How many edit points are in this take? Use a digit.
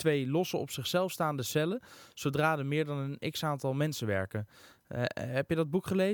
0